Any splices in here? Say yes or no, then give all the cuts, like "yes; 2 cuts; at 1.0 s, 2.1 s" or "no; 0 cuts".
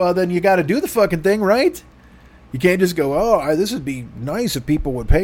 no; 0 cuts